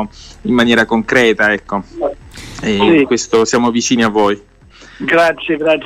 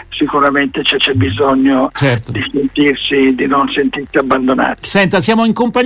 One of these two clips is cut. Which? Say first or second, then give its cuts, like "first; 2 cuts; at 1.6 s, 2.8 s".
second; 1 cut; at 1.0 s